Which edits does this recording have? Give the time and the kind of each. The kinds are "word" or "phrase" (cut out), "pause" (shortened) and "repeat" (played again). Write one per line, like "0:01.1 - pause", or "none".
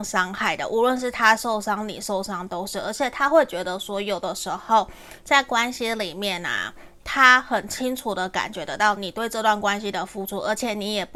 none